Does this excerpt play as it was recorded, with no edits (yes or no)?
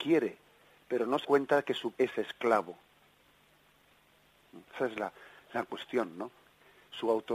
no